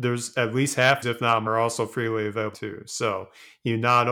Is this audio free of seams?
no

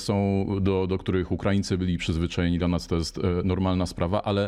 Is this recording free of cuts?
yes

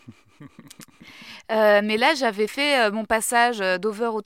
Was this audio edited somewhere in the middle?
no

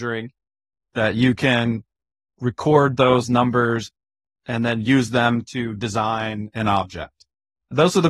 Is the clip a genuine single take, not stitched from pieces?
yes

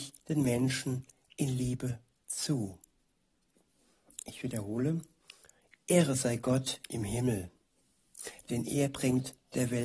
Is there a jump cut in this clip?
no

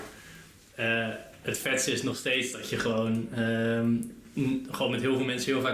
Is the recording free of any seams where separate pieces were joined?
yes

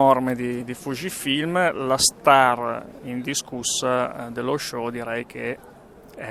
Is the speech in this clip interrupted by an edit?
yes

